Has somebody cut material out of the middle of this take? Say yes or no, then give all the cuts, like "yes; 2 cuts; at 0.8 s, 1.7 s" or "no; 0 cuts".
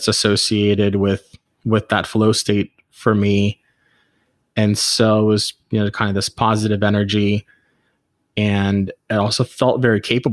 no; 0 cuts